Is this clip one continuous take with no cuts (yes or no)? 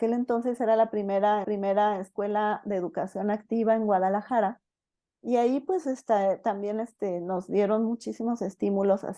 no